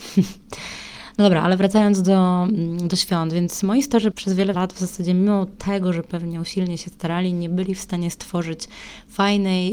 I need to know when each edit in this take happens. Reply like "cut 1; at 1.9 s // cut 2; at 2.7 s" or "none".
cut 1; at 4.1 s // cut 2; at 4.5 s